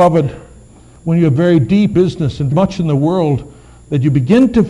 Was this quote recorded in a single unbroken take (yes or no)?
no